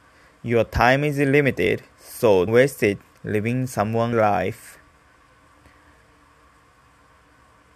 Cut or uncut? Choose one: cut